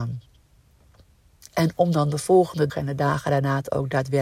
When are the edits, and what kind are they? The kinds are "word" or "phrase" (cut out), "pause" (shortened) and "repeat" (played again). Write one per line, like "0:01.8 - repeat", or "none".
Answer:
0:02.7 - word